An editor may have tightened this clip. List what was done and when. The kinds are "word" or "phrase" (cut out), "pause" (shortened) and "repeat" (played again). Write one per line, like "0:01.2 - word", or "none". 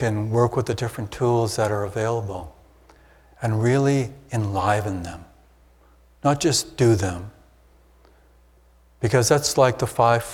none